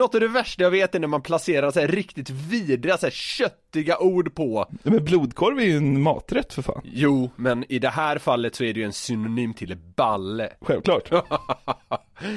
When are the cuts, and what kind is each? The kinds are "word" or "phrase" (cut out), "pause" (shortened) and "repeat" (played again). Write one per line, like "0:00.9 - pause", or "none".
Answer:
none